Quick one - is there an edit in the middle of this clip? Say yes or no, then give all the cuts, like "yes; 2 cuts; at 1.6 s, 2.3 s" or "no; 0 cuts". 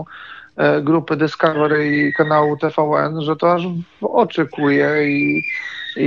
no; 0 cuts